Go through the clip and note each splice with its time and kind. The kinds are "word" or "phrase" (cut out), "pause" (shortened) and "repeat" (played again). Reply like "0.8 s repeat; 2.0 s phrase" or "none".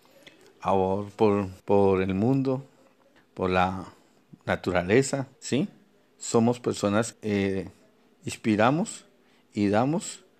1.6 s pause; 3.2 s word; 5.4 s pause; 7.1 s word